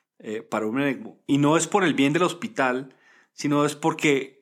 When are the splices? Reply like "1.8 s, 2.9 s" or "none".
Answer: none